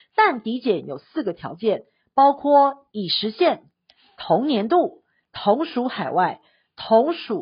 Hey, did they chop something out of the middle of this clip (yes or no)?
no